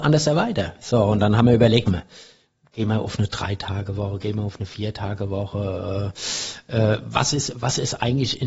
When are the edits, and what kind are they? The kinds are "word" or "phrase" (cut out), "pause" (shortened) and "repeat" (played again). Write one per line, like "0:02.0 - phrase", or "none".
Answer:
0:01.9 - phrase